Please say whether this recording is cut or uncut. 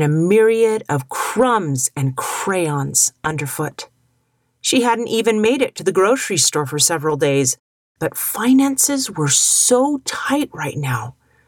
uncut